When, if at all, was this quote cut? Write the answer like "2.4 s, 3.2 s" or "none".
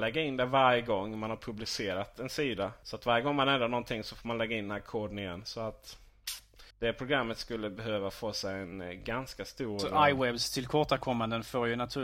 6.7 s